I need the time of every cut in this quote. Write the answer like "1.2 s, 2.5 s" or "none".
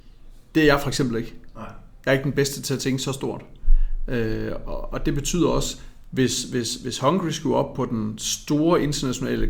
none